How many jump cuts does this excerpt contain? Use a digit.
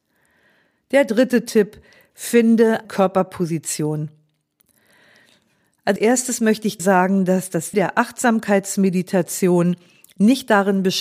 4